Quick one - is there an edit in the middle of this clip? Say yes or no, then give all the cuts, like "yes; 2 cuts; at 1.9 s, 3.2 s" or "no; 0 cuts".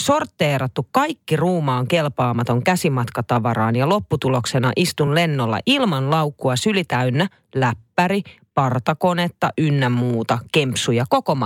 no; 0 cuts